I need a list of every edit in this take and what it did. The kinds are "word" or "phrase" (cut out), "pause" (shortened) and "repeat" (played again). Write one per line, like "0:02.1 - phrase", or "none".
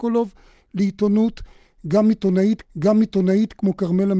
0:02.6 - repeat